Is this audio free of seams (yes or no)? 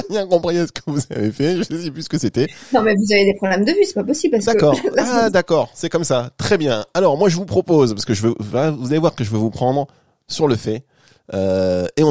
yes